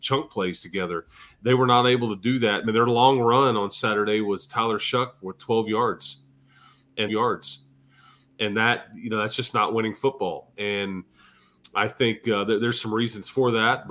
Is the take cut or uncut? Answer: cut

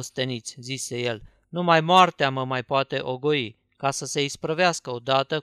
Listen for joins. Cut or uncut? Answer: uncut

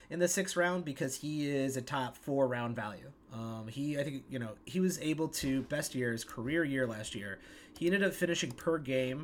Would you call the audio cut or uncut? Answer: cut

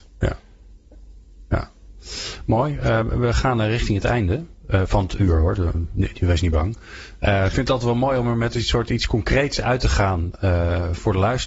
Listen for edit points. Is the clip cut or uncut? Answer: uncut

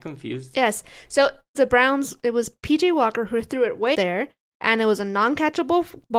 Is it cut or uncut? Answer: cut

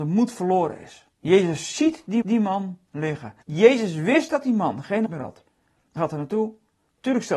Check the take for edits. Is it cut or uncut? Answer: cut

